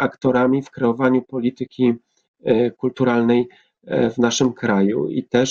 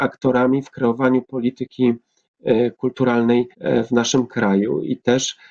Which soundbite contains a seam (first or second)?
second